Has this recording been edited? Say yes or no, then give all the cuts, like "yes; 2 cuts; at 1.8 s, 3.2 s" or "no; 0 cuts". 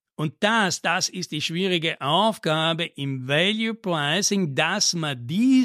no; 0 cuts